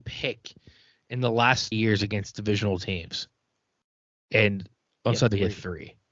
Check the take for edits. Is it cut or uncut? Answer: cut